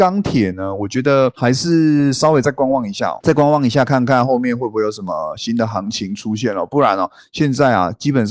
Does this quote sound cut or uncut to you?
uncut